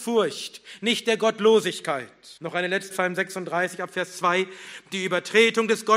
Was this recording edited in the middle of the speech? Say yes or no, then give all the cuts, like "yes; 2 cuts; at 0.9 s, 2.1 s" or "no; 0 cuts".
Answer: yes; 2 cuts; at 2.4 s, 2.9 s